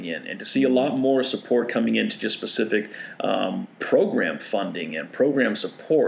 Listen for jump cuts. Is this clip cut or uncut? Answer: uncut